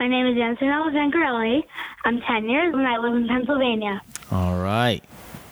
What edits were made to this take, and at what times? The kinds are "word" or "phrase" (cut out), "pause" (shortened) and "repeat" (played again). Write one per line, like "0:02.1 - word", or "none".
0:02.7 - word